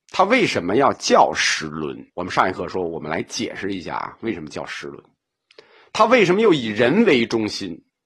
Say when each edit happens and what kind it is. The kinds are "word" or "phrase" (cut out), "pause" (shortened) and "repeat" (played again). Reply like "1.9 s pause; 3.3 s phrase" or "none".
2.1 s pause